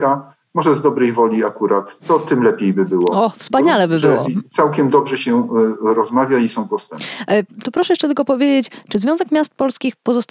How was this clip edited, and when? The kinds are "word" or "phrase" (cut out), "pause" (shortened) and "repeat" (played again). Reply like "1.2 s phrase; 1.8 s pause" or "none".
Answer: 2.0 s pause